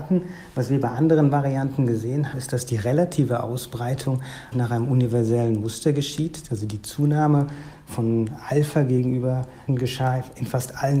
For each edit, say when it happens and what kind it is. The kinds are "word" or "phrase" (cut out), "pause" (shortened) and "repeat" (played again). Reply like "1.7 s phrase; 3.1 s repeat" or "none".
2.3 s word; 4.5 s word; 9.7 s phrase